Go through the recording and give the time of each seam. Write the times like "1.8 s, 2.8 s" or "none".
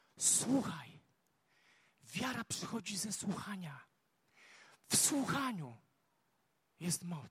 none